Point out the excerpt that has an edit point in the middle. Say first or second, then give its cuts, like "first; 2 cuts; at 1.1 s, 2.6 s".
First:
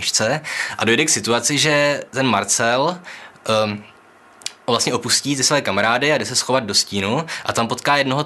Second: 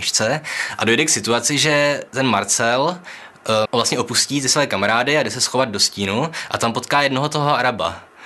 second; 1 cut; at 3.7 s